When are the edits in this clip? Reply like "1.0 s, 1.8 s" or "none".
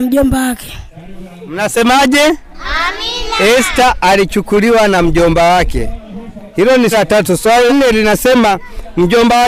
6.9 s, 7.7 s